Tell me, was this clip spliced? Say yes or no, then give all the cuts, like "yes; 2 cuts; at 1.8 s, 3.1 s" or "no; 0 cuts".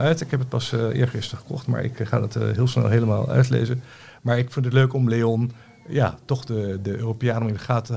no; 0 cuts